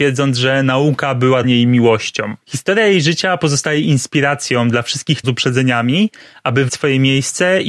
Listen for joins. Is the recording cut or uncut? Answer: cut